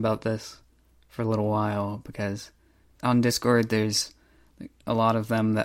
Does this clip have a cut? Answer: no; 0 cuts

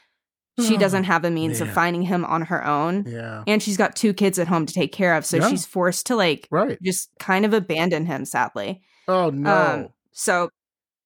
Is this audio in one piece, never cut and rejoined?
no; 1 cut; at 7.1 s

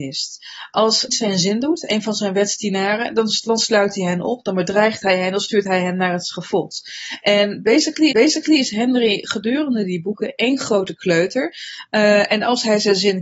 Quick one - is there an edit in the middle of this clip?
yes; 2 cuts; at 1.1 s, 8.1 s

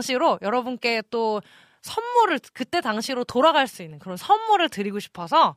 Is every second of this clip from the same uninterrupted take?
yes; 0 cuts

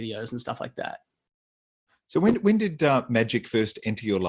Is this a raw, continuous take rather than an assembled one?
yes; 0 cuts

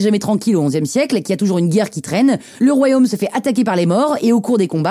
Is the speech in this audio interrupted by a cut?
no; 0 cuts

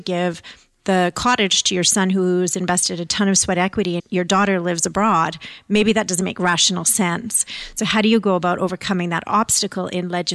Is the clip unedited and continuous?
no; 1 cut; at 4.0 s

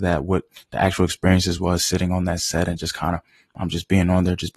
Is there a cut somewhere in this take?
no; 0 cuts

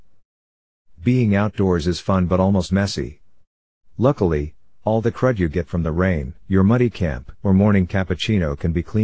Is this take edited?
yes; 3 cuts; at 2.7 s, 6.4 s, 7.4 s

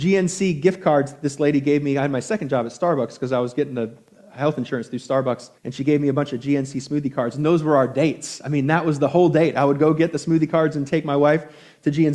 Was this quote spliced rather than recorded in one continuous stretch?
yes; 1 cut; at 5.6 s

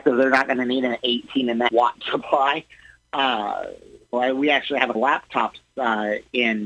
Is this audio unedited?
no; 4 cuts; at 1.7 s, 2.0 s, 4.1 s, 4.9 s

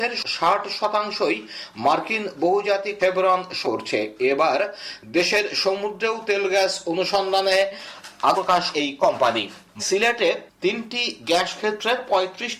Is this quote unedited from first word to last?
no; 5 cuts; at 3.0 s, 3.6 s, 8.3 s, 8.7 s, 9.8 s

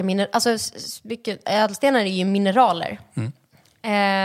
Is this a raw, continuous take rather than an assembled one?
yes; 0 cuts

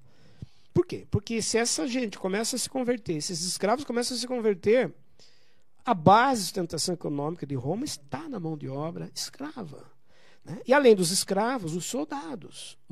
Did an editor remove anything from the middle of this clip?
no; 0 cuts

